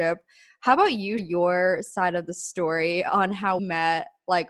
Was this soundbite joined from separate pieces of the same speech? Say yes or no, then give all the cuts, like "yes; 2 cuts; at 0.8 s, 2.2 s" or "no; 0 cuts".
yes; 2 cuts; at 1.2 s, 3.6 s